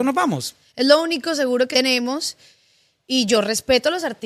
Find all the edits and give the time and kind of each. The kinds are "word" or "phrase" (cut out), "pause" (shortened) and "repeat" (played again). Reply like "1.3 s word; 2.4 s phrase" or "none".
1.7 s word

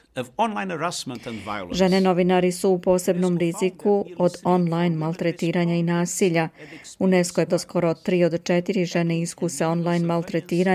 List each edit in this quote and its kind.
7.5 s word

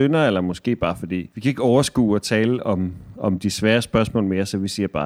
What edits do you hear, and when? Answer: 1.3 s pause

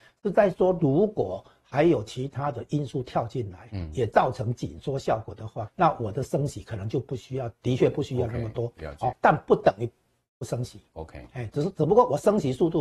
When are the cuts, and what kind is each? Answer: 5.7 s word; 9.1 s word

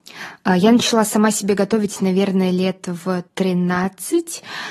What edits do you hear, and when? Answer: 3.3 s pause

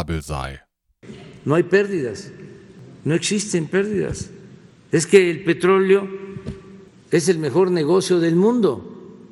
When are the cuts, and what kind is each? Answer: none

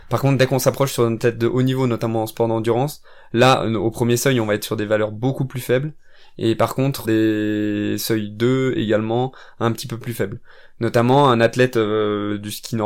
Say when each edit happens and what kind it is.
7.0 s word

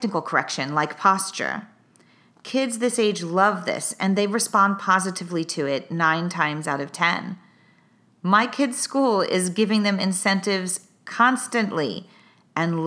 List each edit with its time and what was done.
none

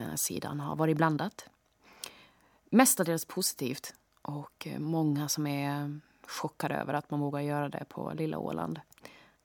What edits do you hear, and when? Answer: none

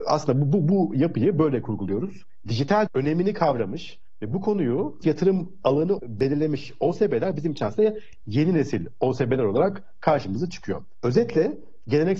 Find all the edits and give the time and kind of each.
2.9 s word; 5.0 s word; 6.0 s word

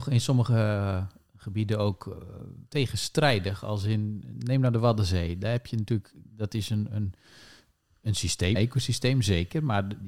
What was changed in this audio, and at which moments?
2.6 s pause; 8.6 s word

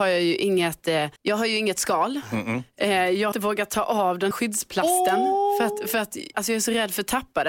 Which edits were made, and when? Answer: 1.2 s pause; 3.3 s word; 4.3 s word; 6.3 s word

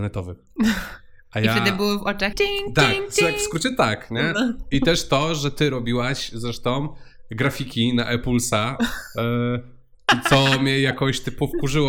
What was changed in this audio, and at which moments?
2.3 s word

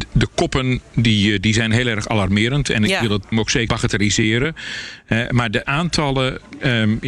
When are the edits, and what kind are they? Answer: 3.3 s word; 3.7 s word; 5.6 s word

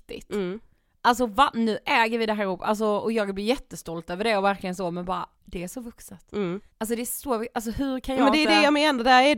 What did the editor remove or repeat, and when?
5.3 s pause; 6.7 s pause

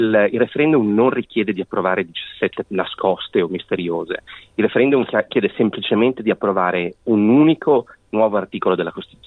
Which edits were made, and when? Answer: 2.6 s word

